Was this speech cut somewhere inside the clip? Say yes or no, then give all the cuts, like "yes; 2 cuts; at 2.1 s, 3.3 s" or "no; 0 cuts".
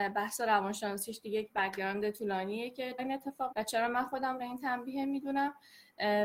yes; 3 cuts; at 3.0 s, 3.5 s, 4.4 s